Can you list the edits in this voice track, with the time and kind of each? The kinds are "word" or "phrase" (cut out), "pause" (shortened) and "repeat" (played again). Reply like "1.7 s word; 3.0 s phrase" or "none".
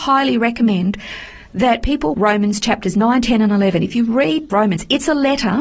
2.1 s word; 4.5 s phrase